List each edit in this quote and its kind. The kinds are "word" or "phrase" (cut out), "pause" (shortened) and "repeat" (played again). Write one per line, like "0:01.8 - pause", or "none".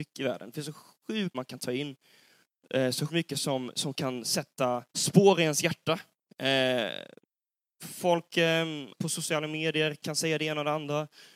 0:01.3 - word
0:03.1 - word
0:04.9 - pause
0:08.9 - word